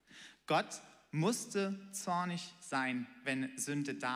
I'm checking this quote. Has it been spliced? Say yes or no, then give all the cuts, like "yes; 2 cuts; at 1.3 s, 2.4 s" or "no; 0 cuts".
no; 0 cuts